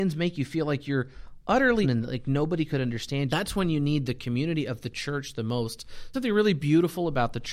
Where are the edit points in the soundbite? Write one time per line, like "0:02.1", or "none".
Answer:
0:01.8
0:03.3
0:06.1

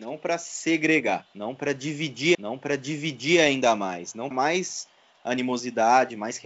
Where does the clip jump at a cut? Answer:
0:02.3
0:04.3

